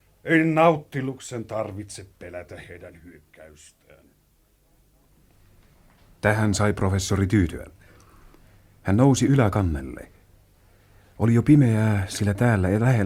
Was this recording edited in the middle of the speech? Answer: no; 0 cuts

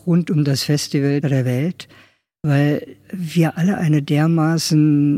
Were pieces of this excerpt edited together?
yes; 2 cuts; at 1.2 s, 3.0 s

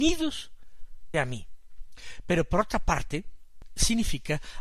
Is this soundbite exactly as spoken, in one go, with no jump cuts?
no; 1 cut; at 1.1 s

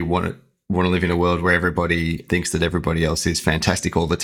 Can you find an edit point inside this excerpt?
yes; 1 cut; at 2.3 s

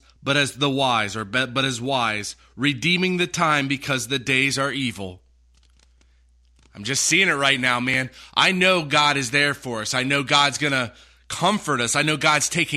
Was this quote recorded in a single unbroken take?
yes; 0 cuts

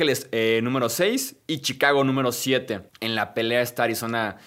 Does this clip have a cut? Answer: yes; 2 cuts; at 1.4 s, 2.9 s

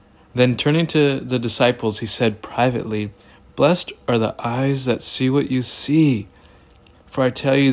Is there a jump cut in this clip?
no; 0 cuts

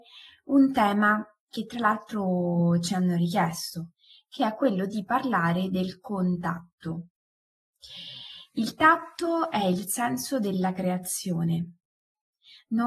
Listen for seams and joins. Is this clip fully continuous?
yes; 0 cuts

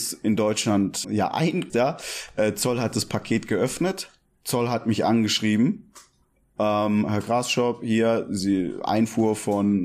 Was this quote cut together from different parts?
yes; 2 cuts; at 1.0 s, 1.7 s

